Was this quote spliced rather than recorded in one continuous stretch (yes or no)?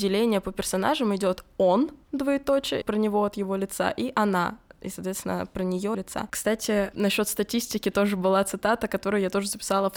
yes